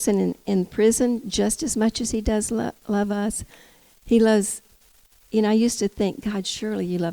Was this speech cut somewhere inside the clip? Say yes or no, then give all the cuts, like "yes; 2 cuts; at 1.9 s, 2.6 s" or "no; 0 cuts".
no; 0 cuts